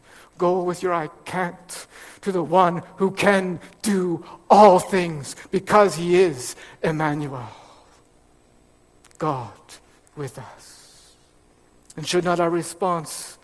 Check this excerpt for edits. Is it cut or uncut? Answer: cut